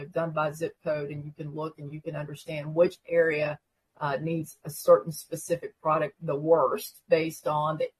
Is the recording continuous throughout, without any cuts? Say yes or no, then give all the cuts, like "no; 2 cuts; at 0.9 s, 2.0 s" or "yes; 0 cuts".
yes; 0 cuts